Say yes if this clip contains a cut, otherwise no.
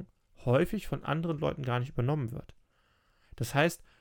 no